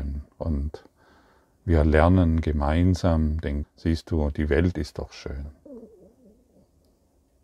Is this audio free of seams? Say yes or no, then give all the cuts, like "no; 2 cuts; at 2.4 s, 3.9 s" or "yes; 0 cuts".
no; 1 cut; at 3.6 s